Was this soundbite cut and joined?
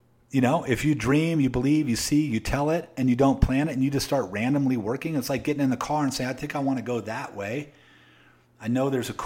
no; 0 cuts

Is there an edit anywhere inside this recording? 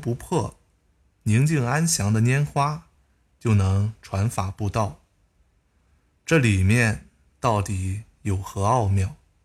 no; 0 cuts

